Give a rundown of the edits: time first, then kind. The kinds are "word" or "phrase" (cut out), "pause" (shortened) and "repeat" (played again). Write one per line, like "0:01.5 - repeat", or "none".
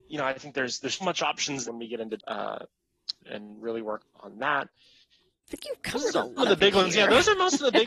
0:01.0 - word
0:01.7 - word
0:02.2 - word
0:03.2 - word
0:04.0 - word
0:06.4 - word